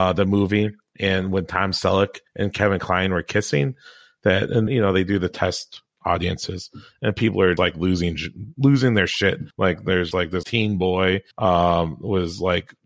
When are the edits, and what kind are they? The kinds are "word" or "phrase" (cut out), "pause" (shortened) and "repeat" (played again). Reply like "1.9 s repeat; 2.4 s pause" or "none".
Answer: 2.3 s pause; 4.7 s phrase; 7.6 s word; 9.5 s pause; 10.1 s word; 10.4 s word; 11.3 s pause

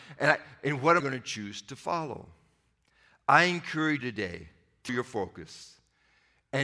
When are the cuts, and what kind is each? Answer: 1.0 s word; 4.0 s word; 4.9 s word

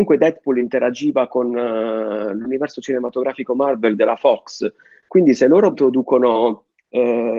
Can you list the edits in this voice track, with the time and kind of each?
5.7 s word

